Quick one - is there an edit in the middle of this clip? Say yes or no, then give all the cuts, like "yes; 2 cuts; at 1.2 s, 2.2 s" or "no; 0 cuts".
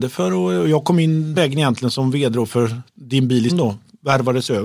yes; 3 cuts; at 1.3 s, 2.9 s, 3.5 s